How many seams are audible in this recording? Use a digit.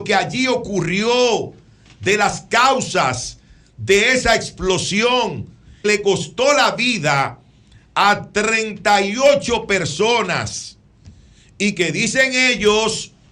1